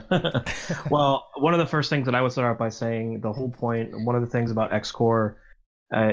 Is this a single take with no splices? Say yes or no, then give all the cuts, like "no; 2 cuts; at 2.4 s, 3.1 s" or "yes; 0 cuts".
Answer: yes; 0 cuts